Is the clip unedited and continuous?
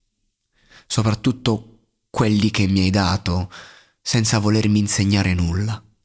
yes; 0 cuts

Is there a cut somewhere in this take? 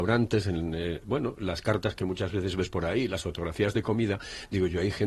no; 0 cuts

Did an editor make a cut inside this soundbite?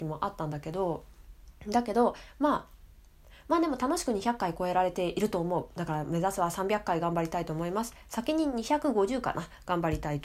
yes; 1 cut; at 1.6 s

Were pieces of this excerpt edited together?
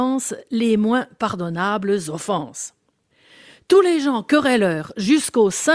no; 0 cuts

